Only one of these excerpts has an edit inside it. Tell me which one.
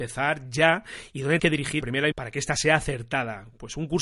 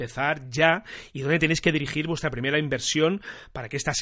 first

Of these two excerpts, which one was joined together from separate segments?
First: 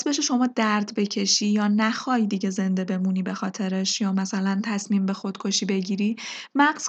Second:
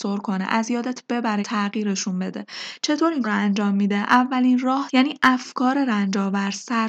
second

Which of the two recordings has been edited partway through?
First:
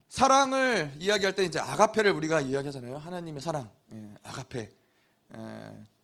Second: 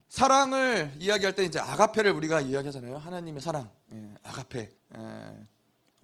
second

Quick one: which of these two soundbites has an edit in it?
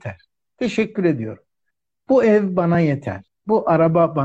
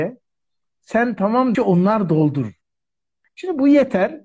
second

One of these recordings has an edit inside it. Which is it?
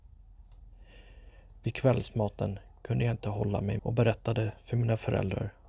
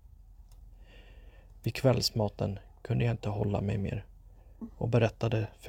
first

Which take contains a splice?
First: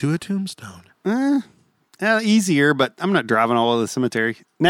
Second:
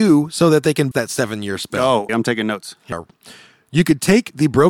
second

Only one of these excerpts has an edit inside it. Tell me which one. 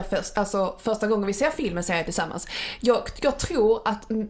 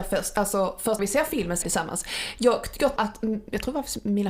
second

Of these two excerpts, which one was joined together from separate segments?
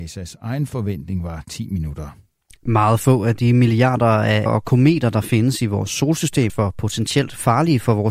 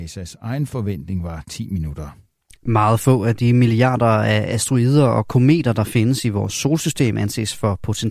first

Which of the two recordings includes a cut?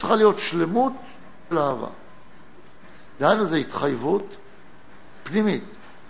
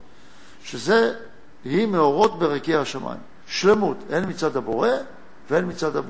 first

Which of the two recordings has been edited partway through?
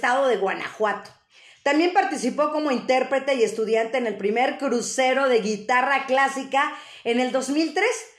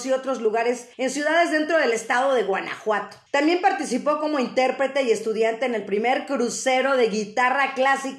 second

